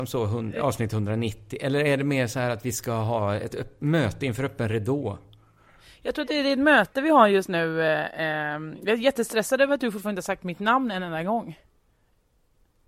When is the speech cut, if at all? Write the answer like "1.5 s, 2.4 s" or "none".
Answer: none